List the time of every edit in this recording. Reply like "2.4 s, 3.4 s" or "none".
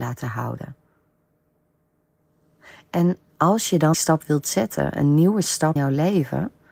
3.9 s, 5.8 s